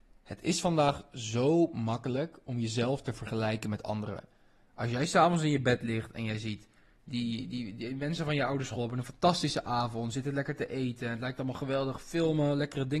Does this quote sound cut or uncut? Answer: uncut